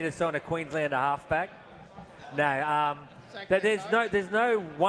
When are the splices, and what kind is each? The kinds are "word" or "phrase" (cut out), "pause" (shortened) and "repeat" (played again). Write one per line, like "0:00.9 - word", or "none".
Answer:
none